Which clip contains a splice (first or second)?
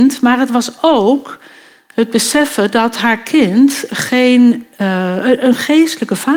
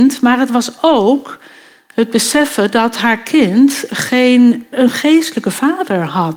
second